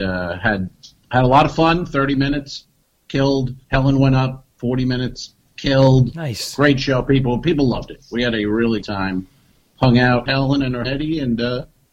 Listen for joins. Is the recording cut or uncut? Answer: cut